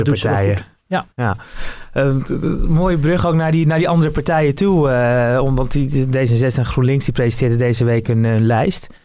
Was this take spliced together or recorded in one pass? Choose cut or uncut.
uncut